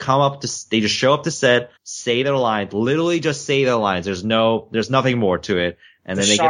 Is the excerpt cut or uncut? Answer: cut